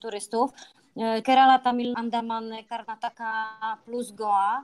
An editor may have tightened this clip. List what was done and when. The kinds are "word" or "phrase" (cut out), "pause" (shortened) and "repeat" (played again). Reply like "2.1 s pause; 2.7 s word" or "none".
1.2 s word; 1.9 s word